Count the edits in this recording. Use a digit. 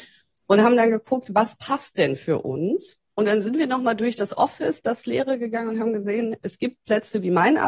1